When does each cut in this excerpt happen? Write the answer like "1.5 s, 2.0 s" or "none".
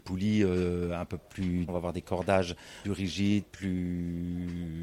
1.7 s, 2.8 s